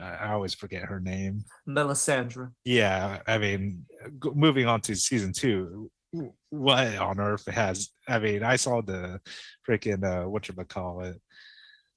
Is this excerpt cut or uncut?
cut